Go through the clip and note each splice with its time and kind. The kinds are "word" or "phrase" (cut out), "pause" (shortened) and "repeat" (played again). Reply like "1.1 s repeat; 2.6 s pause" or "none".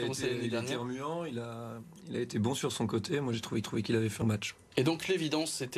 3.6 s repeat; 4.2 s word